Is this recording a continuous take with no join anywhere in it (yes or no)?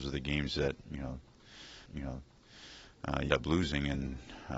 no